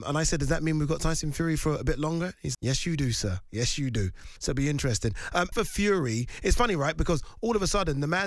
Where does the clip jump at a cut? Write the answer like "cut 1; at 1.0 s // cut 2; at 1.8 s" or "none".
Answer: cut 1; at 2.5 s // cut 2; at 4.4 s // cut 3; at 5.5 s